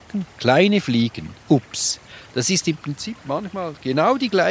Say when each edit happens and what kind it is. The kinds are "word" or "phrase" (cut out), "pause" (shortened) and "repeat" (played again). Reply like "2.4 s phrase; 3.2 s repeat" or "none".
1.4 s pause